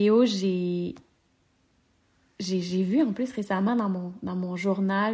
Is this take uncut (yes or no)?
yes